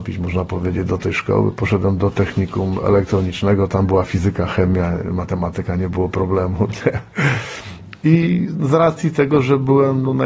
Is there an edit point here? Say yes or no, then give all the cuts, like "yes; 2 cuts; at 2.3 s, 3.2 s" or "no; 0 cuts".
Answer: no; 0 cuts